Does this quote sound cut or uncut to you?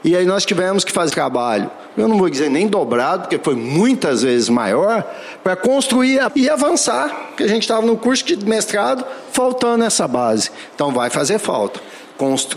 cut